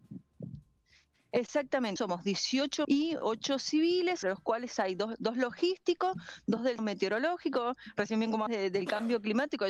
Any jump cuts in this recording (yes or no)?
yes